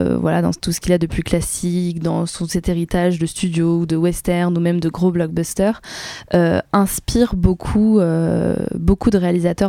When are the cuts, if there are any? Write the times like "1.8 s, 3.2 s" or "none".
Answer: none